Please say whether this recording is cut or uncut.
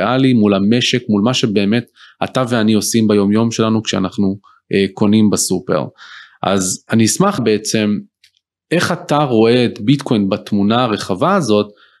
cut